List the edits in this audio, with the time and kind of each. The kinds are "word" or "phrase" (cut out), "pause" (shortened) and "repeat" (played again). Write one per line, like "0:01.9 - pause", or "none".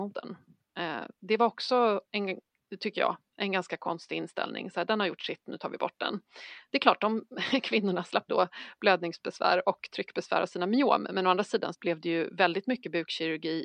0:08.3 - word
0:11.7 - word

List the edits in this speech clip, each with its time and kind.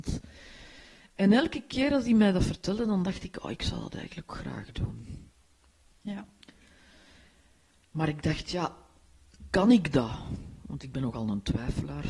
0:04.3 - word

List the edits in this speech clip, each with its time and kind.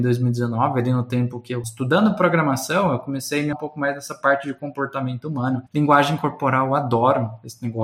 0:01.6 - word
0:03.5 - word
0:05.7 - pause

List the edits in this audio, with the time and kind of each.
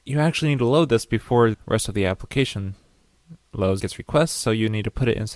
0:01.5 - word
0:03.8 - word

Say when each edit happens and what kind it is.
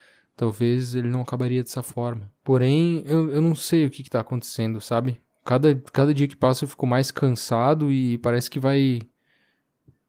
0:02.4 - pause

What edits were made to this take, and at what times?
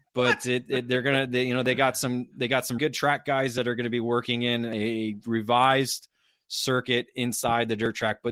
0:02.8 - word

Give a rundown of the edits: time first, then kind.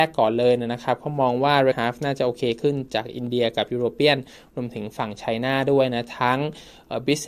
0:01.7 - phrase

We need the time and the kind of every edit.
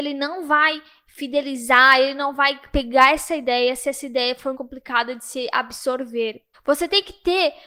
0:04.5 - word
0:06.5 - pause

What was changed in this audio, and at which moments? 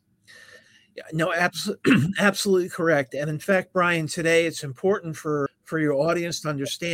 0:05.5 - word

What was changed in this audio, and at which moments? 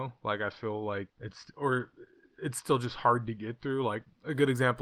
0:01.1 - word

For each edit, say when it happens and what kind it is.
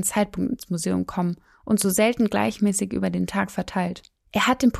none

